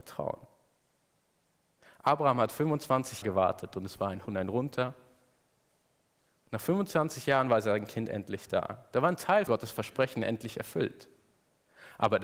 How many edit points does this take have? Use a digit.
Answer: 3